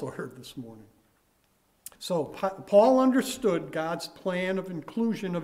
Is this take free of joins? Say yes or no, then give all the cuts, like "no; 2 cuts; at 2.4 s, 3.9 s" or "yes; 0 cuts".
no; 1 cut; at 2.0 s